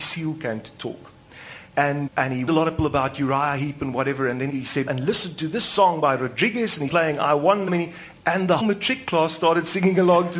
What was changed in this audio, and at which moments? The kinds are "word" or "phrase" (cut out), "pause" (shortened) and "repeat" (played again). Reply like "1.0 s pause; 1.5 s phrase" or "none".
2.1 s word; 2.5 s word; 2.8 s word; 4.5 s word; 4.9 s word; 6.9 s word; 7.7 s word; 8.6 s word